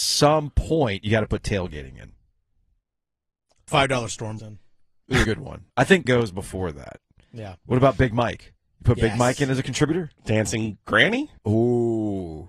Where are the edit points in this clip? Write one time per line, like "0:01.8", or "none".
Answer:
0:03.7
0:04.4
0:05.2
0:05.7
0:06.1
0:07.6
0:08.6
0:11.4